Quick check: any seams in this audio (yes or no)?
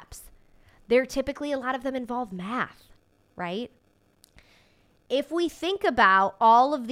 no